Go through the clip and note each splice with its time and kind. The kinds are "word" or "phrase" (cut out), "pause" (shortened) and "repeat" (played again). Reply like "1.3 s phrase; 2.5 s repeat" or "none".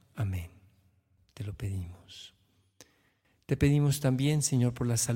none

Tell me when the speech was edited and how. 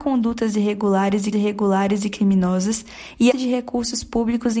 1.3 s repeat; 3.3 s word

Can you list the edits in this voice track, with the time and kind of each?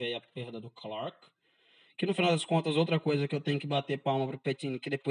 none

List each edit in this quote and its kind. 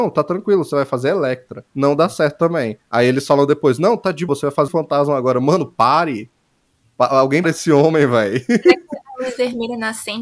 1.7 s pause; 2.8 s pause; 4.3 s word; 4.7 s word; 7.4 s word

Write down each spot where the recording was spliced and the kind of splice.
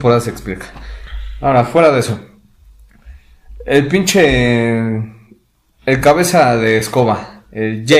none

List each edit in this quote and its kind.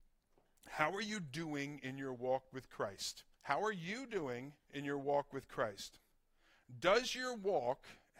3.3 s pause; 4.6 s pause

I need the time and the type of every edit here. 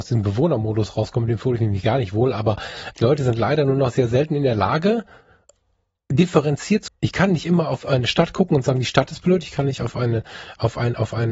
1.6 s word; 2.9 s word; 6.9 s word

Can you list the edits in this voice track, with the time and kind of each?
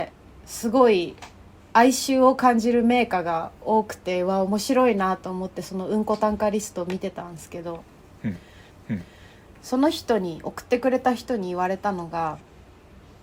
8.7 s repeat

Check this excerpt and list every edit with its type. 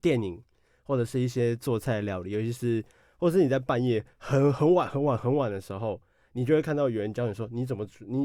4.1 s pause

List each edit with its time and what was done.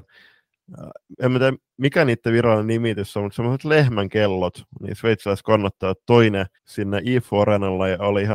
6.6 s pause

